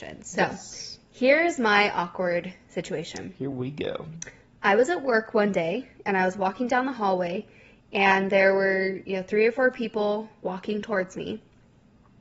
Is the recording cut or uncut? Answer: uncut